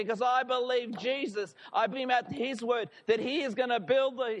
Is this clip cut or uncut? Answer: cut